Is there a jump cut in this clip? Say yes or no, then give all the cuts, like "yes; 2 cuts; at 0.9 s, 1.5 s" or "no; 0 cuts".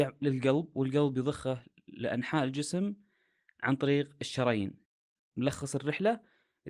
no; 0 cuts